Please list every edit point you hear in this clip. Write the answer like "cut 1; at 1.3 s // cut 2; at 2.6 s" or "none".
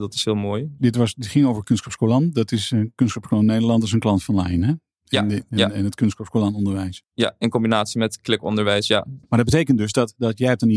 cut 1; at 9.2 s